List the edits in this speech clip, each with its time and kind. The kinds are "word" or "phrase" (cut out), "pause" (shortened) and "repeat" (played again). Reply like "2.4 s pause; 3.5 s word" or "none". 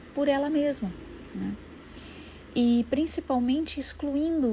none